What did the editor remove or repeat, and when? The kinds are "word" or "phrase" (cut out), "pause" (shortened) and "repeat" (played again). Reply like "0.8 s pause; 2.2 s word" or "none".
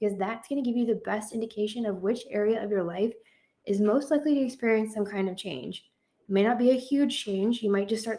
none